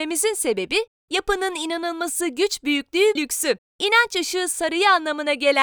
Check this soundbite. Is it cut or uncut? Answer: cut